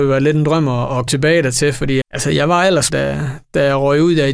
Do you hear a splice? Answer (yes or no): yes